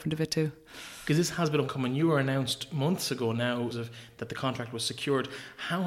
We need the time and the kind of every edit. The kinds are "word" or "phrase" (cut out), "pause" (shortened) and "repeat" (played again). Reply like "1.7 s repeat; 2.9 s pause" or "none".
1.6 s word; 3.7 s phrase